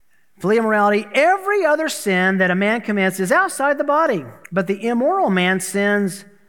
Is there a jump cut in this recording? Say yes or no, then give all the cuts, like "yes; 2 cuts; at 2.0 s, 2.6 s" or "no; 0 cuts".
yes; 1 cut; at 4.4 s